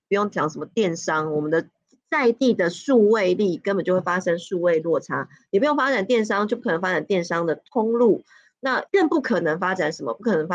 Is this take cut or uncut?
cut